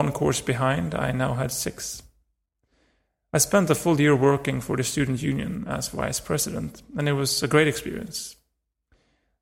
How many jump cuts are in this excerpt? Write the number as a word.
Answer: zero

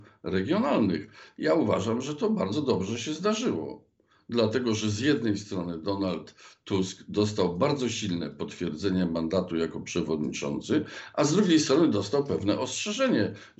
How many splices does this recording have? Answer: zero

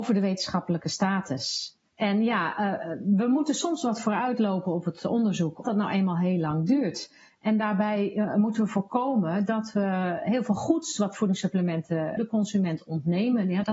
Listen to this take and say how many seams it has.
three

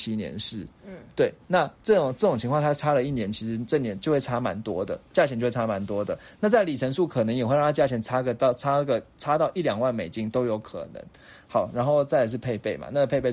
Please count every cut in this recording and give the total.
one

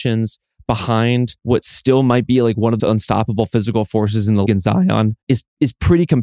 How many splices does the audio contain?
four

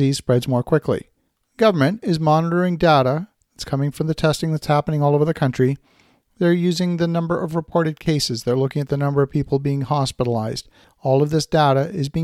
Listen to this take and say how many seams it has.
zero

